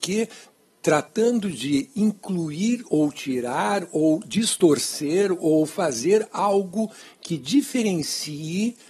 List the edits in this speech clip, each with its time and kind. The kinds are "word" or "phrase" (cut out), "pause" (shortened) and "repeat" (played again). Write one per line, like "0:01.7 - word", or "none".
none